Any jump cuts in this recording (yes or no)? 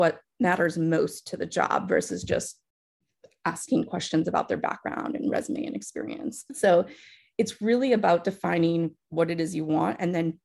no